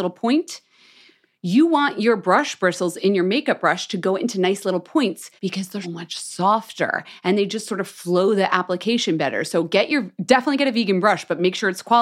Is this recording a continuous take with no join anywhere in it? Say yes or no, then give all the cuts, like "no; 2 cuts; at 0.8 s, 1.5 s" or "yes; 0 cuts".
no; 2 cuts; at 5.4 s, 5.8 s